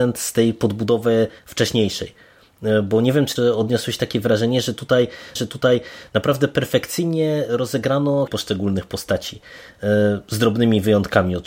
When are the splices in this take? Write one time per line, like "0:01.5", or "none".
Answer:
0:01.4
0:03.4
0:05.4
0:08.3